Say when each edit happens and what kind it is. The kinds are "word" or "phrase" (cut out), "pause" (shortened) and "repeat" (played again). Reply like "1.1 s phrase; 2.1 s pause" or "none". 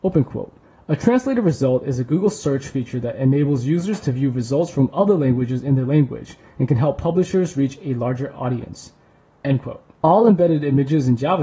none